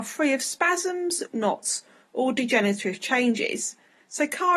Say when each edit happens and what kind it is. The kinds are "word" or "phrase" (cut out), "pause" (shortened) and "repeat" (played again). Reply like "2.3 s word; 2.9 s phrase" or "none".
1.3 s phrase